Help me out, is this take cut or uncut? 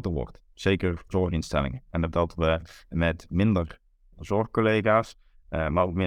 cut